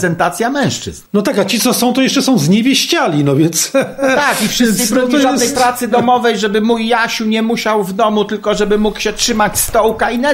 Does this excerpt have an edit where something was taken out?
yes; 1 cut; at 1.1 s

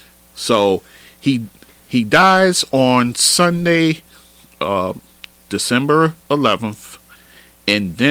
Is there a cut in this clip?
no; 0 cuts

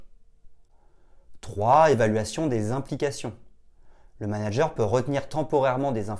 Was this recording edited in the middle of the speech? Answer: no; 0 cuts

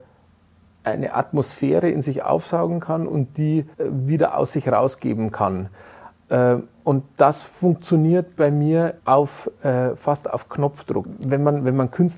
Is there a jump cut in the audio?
yes; 2 cuts; at 3.7 s, 9.0 s

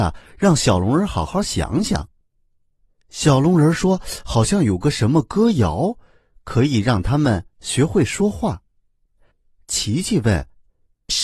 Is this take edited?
no; 0 cuts

